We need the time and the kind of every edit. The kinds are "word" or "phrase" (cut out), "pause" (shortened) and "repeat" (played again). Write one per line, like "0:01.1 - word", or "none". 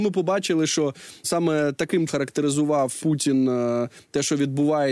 0:01.2 - word
0:02.1 - word
0:03.0 - word